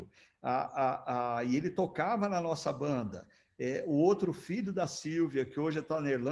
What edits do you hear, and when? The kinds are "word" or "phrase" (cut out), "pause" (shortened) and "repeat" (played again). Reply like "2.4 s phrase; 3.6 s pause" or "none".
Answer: none